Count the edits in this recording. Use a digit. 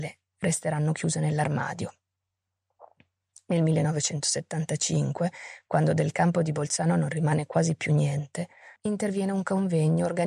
1